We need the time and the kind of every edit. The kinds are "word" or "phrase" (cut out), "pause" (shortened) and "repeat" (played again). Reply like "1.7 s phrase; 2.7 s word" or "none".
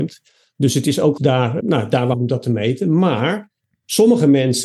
1.2 s word; 1.6 s word; 2.1 s word